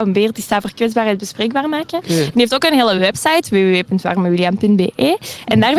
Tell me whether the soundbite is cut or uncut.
uncut